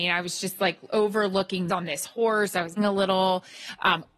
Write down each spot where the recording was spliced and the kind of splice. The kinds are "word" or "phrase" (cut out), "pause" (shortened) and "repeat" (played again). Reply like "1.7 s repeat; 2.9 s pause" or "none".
1.7 s phrase; 2.8 s word